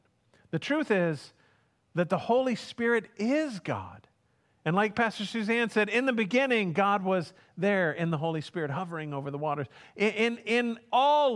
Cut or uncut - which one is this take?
uncut